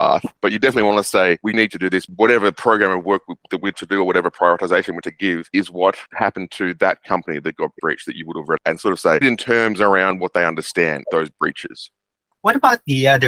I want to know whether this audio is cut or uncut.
cut